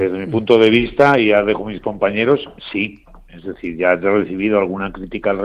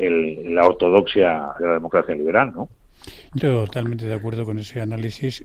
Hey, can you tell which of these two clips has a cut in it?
second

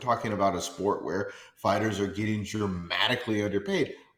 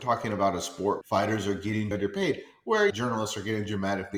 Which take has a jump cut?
second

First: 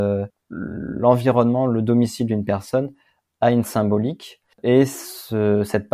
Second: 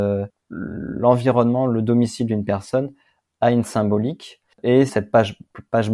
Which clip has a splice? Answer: second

